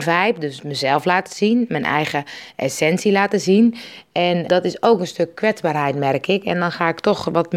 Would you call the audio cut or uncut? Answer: cut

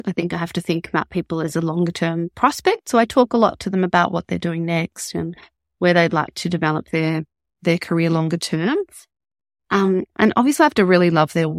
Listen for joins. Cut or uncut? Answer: uncut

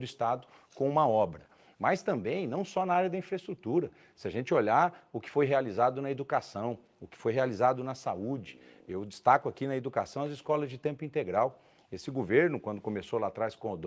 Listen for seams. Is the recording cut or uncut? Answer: uncut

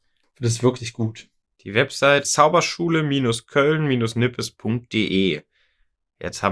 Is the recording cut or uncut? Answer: cut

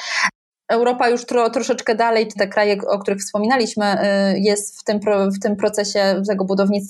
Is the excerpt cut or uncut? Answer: cut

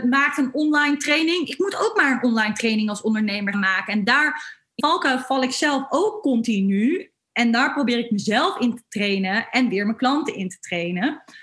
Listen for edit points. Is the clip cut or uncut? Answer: cut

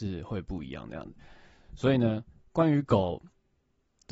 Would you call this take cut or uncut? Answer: uncut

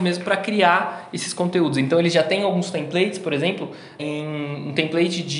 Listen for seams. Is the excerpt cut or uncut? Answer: cut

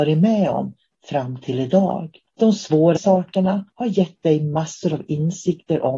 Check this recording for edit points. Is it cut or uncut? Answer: cut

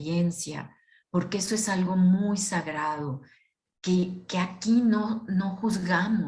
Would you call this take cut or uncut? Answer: uncut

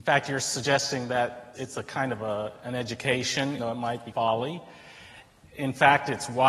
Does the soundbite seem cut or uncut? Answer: cut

